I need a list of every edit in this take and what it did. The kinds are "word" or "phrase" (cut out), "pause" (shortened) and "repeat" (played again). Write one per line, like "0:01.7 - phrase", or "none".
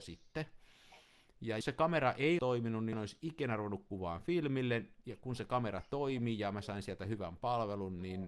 0:01.6 - word
0:02.4 - word
0:02.9 - word